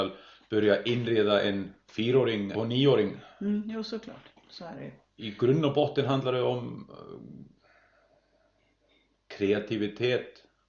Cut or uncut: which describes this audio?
cut